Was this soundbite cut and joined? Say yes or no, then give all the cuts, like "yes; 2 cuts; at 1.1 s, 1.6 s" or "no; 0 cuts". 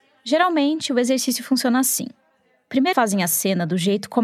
yes; 1 cut; at 2.9 s